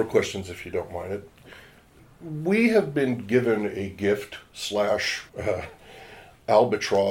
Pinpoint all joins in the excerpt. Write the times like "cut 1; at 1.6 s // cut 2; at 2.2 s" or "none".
cut 1; at 5.3 s